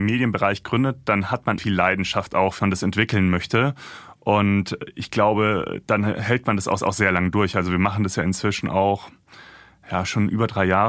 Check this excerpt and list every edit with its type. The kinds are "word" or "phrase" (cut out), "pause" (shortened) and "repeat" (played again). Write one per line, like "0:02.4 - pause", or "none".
0:01.6 - phrase
0:02.6 - phrase
0:06.8 - repeat